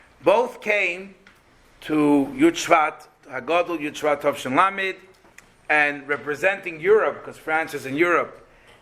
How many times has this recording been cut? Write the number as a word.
zero